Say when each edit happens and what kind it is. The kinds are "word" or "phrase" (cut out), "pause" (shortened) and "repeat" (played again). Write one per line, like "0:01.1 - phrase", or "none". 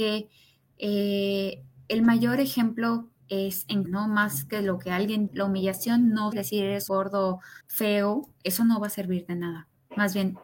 0:03.2 - pause
0:03.9 - word
0:05.3 - word
0:06.3 - word
0:06.9 - word
0:07.6 - pause